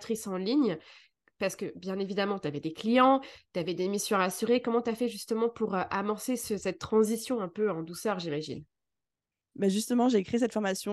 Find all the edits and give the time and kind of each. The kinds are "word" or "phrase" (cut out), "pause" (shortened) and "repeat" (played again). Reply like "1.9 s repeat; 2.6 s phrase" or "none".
none